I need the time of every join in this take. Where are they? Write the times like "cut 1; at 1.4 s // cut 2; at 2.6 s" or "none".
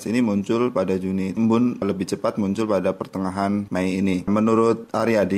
cut 1; at 1.4 s